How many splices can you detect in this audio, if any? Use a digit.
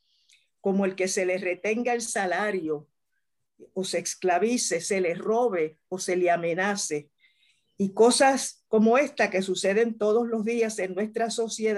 0